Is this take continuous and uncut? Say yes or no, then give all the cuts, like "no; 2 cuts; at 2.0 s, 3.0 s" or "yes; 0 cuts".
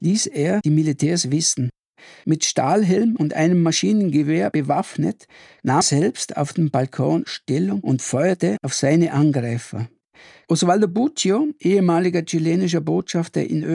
no; 1 cut; at 5.8 s